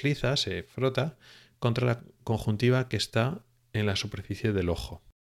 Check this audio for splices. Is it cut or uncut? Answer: uncut